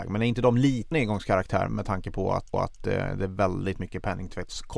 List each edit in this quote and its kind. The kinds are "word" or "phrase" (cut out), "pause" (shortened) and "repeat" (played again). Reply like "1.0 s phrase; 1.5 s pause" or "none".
0.9 s word; 1.7 s word; 2.5 s repeat